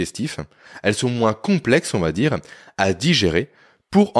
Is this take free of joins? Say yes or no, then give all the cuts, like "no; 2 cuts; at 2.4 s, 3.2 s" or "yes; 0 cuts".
yes; 0 cuts